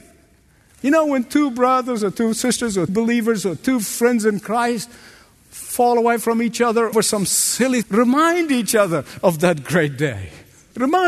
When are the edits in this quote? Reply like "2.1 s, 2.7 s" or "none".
2.9 s, 6.9 s, 7.8 s